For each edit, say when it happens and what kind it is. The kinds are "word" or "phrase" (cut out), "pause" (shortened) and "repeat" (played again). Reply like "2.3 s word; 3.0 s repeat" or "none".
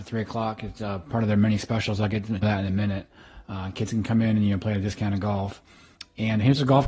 2.4 s phrase